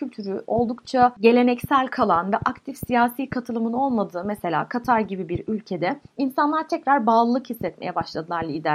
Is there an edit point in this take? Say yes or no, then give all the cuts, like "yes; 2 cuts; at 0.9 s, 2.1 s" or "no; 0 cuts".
no; 0 cuts